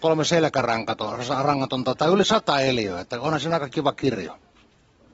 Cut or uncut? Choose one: uncut